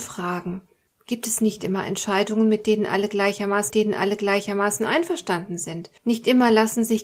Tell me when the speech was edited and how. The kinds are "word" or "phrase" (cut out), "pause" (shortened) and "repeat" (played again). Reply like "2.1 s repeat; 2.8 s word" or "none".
3.7 s repeat; 6.0 s pause